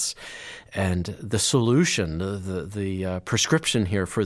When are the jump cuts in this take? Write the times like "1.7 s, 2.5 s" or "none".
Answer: none